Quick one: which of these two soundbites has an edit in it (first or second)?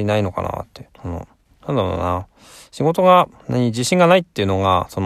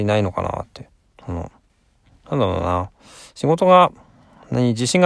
first